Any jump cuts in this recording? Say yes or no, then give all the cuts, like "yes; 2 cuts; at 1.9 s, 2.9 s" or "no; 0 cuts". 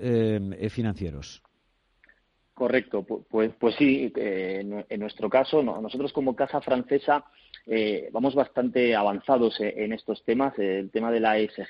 no; 0 cuts